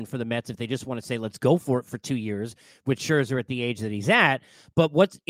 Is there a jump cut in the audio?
no; 0 cuts

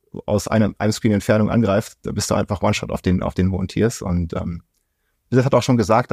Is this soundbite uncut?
yes; 0 cuts

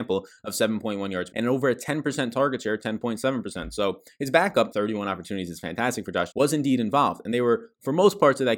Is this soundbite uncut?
no; 3 cuts; at 1.3 s, 4.7 s, 6.3 s

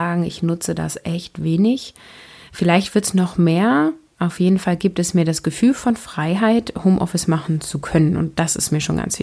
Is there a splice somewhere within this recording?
no; 0 cuts

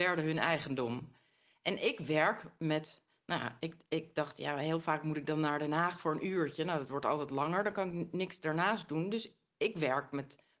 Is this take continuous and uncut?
yes; 0 cuts

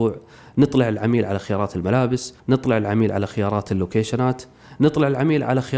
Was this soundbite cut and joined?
yes; 1 cut; at 2.4 s

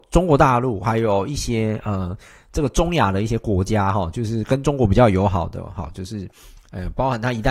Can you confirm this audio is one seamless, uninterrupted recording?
yes; 0 cuts

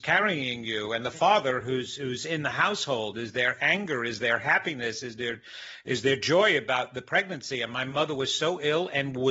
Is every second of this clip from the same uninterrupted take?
yes; 0 cuts

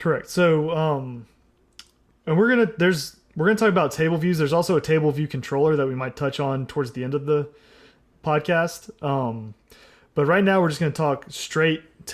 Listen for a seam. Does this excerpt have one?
no; 0 cuts

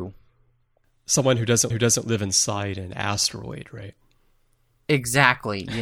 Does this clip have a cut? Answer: yes; 1 cut; at 1.7 s

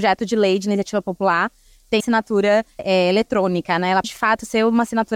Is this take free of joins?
no; 3 cuts; at 2.0 s, 2.8 s, 4.0 s

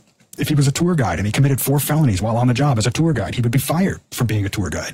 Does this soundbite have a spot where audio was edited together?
no; 0 cuts

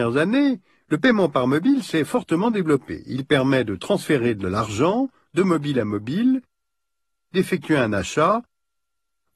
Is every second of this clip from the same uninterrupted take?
yes; 0 cuts

